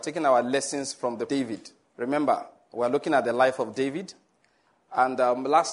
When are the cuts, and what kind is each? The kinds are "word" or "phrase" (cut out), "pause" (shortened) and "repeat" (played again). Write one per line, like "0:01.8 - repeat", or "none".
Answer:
0:01.3 - word
0:01.8 - pause